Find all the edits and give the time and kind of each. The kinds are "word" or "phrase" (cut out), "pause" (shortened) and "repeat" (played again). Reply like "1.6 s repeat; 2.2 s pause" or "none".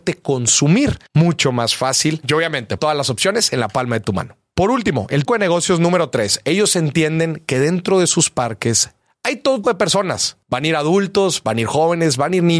1.1 s pause; 2.8 s word; 5.3 s word; 9.6 s word; 10.4 s pause

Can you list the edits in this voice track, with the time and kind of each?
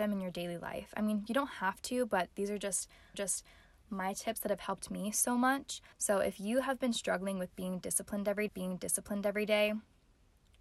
3.1 s repeat; 5.9 s pause; 8.5 s repeat

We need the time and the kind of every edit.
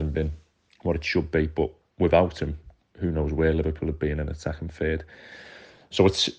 none

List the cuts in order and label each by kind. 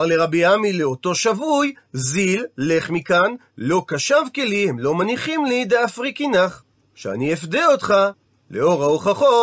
none

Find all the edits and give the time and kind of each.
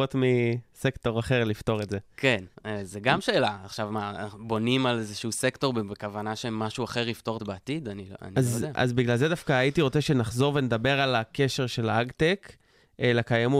2.5 s pause; 7.4 s phrase

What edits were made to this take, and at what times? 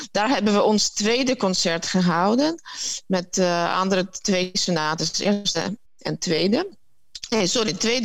5.9 s pause

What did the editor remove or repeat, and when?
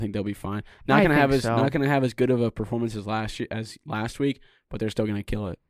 none

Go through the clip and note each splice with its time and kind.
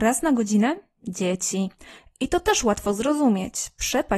none

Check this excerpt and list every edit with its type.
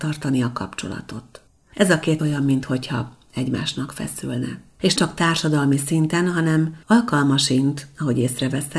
1.5 s pause; 2.2 s phrase; 5.0 s word; 6.8 s pause

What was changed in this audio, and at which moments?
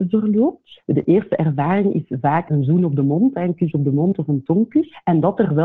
none

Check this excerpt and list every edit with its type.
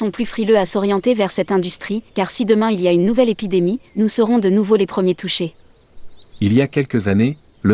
2.1 s pause; 3.9 s pause

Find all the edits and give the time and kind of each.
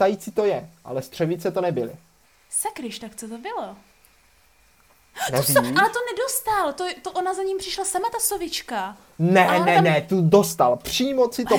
2.2 s pause

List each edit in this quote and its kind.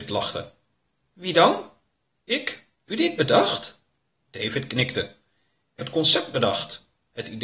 2.9 s word; 5.8 s word

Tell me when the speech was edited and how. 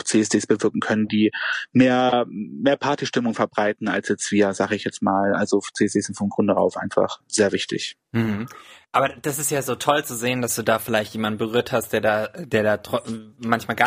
none

